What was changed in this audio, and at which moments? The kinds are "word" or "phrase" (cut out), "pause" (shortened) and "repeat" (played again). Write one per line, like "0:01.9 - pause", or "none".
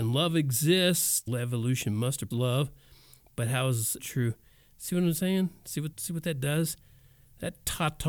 0:01.3 - word
0:02.3 - word
0:04.0 - word
0:05.9 - word